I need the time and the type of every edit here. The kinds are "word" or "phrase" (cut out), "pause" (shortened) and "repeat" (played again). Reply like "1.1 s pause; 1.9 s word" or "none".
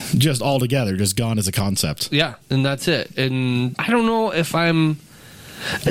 2.4 s pause; 3.7 s word